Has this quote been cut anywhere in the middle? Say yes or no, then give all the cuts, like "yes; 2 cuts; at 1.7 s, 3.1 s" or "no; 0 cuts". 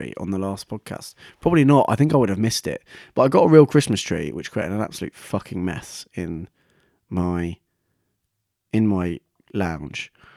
no; 0 cuts